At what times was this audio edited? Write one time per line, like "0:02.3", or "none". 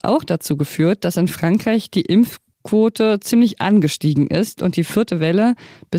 none